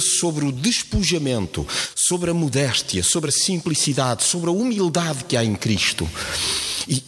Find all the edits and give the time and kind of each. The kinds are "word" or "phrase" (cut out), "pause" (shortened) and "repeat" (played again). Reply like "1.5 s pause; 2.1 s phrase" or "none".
none